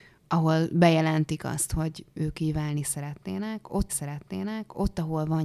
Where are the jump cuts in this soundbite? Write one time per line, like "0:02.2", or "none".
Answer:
0:03.9